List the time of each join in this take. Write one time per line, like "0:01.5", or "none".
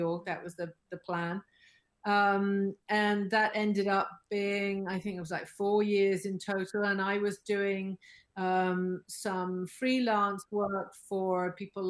none